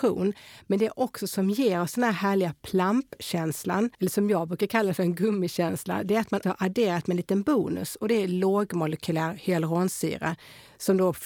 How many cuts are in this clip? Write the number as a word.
two